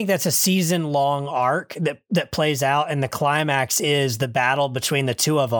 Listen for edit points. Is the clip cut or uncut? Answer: uncut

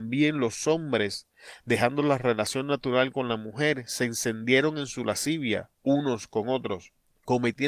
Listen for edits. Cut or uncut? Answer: cut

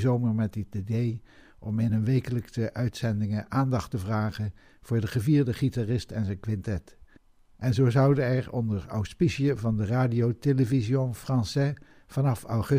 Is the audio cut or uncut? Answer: uncut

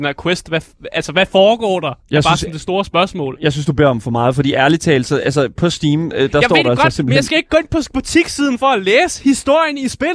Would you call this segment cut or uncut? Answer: uncut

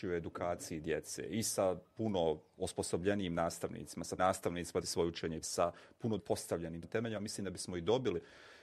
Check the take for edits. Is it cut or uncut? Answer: cut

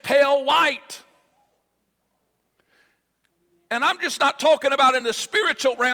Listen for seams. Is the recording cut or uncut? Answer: uncut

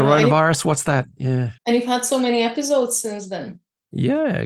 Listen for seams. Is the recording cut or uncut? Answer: cut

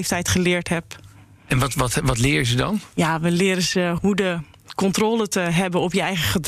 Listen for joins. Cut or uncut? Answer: uncut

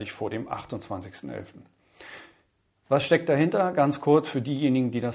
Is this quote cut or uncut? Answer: uncut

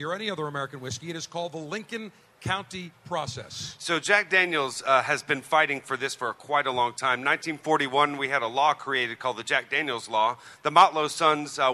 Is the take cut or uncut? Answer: uncut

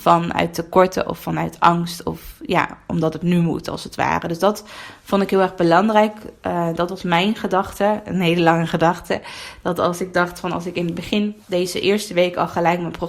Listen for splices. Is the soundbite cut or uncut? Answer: cut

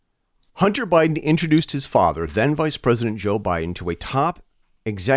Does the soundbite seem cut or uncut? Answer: uncut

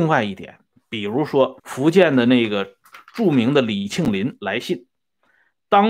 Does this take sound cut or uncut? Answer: cut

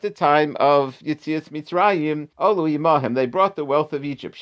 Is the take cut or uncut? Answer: cut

